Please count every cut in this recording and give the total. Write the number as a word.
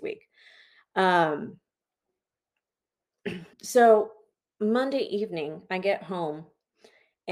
one